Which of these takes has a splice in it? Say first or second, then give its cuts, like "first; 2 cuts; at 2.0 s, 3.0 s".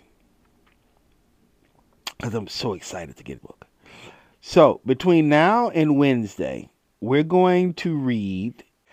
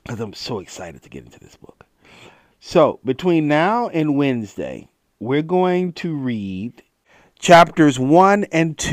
first; 1 cut; at 3.4 s